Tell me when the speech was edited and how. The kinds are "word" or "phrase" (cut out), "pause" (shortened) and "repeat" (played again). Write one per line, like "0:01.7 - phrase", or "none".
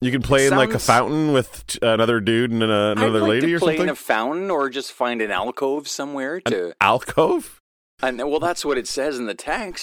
none